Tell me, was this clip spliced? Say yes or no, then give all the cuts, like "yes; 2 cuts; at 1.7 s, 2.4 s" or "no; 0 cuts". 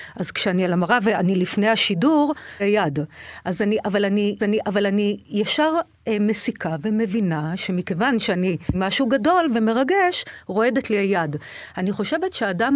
yes; 3 cuts; at 2.6 s, 4.4 s, 8.7 s